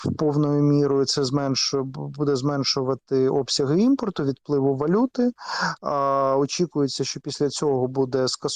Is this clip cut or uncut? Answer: uncut